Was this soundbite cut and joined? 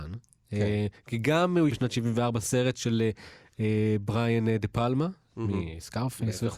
yes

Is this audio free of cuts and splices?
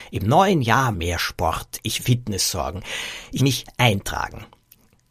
no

